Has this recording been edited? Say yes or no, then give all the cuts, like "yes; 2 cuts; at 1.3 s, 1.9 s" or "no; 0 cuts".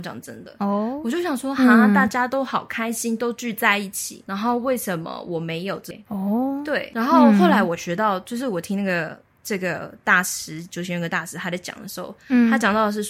no; 0 cuts